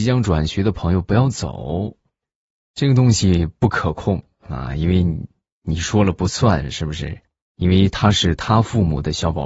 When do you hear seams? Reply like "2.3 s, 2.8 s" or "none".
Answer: none